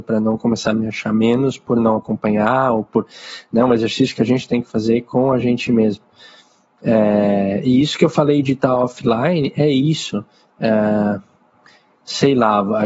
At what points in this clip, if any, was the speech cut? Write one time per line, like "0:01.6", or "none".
none